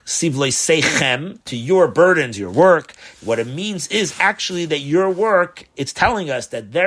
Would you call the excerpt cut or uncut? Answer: cut